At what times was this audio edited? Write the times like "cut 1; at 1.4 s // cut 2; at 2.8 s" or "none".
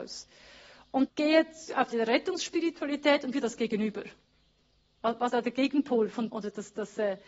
cut 1; at 1.1 s // cut 2; at 1.9 s // cut 3; at 3.3 s // cut 4; at 5.3 s // cut 5; at 6.3 s